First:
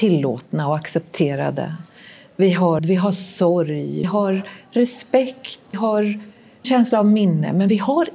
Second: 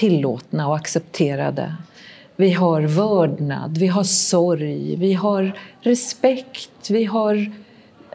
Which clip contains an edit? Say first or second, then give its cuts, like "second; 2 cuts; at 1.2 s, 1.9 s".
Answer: first; 4 cuts; at 2.8 s, 4.0 s, 5.7 s, 6.6 s